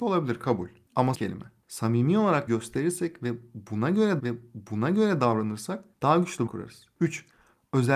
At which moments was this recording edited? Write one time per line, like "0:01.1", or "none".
0:01.1
0:02.5
0:04.2
0:06.5